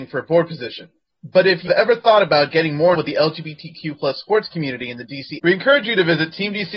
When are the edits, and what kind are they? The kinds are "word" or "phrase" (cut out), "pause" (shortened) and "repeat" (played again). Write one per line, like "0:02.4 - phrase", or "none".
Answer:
0:01.7 - word
0:03.0 - word
0:05.4 - word